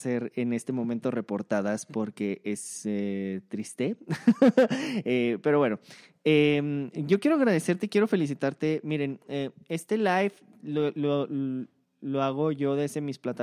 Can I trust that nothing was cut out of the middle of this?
yes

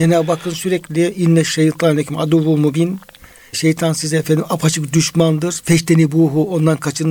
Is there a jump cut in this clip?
no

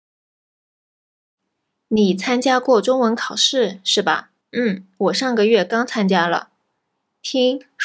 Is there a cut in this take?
yes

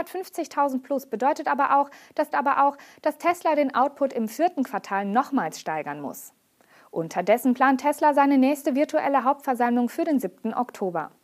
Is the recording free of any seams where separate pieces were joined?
no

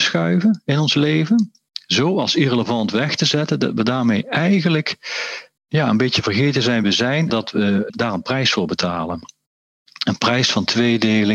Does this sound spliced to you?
yes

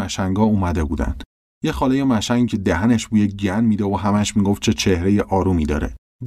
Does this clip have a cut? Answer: yes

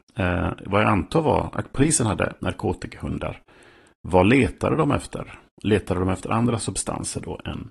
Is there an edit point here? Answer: yes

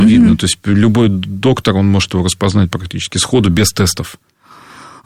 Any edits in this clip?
no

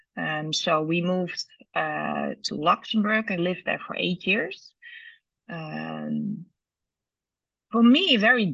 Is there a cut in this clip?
yes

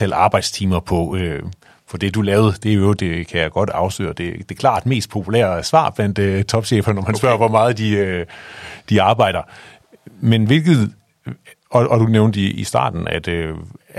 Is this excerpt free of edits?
yes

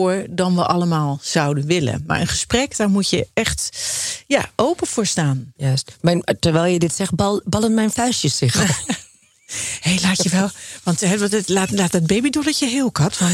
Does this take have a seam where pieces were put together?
no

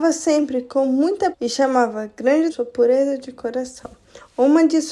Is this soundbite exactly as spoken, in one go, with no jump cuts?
no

